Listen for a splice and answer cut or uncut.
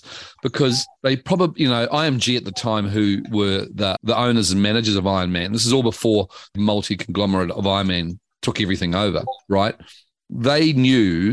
cut